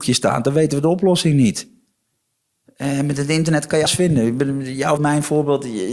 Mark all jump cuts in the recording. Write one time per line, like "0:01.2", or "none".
0:03.9
0:05.0